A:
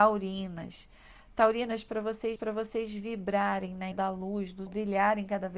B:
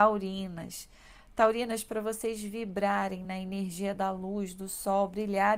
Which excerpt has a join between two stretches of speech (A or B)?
A